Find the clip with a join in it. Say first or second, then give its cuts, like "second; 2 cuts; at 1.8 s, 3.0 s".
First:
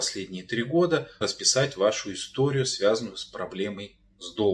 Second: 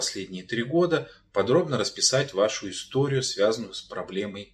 first; 1 cut; at 1.2 s